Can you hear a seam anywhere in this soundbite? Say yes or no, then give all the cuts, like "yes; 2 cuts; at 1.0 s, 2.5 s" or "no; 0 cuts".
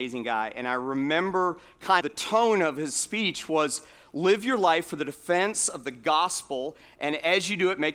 yes; 1 cut; at 2.0 s